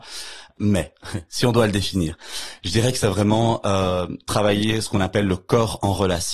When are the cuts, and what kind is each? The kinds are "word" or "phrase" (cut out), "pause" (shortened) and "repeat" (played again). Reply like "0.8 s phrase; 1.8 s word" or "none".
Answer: none